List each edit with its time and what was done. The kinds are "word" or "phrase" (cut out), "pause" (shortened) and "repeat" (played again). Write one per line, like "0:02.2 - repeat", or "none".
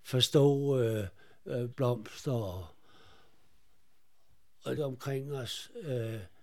0:01.7 - word
0:04.8 - word